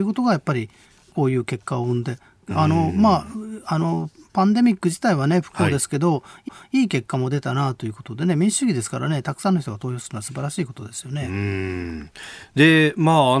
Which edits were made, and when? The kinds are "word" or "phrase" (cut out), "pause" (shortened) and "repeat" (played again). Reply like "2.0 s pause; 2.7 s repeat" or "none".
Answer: 6.5 s repeat